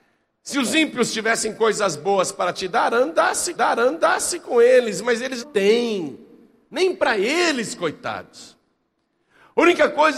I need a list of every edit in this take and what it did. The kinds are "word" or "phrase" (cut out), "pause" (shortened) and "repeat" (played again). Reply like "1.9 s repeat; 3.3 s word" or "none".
3.6 s repeat; 5.4 s word